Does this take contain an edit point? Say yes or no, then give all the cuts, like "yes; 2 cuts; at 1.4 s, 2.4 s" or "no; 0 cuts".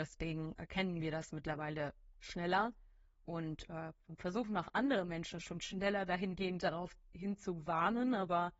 no; 0 cuts